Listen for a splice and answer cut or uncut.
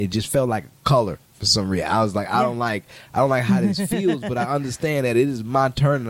uncut